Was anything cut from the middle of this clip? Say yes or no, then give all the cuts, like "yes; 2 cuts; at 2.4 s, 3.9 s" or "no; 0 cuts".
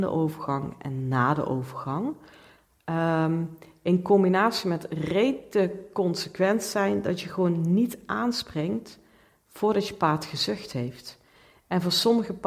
no; 0 cuts